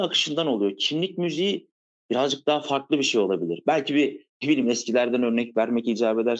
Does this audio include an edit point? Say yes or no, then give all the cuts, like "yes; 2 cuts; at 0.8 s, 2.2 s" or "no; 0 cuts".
no; 0 cuts